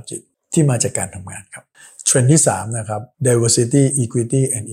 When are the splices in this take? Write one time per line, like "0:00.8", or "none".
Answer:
0:01.7
0:03.1